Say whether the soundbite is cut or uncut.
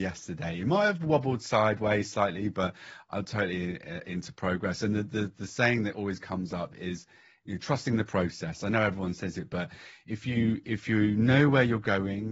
uncut